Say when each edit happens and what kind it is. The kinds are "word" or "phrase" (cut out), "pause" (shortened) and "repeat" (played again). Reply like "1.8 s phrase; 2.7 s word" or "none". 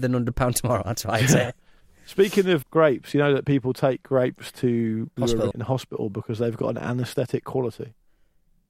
2.6 s word; 5.2 s word; 5.5 s word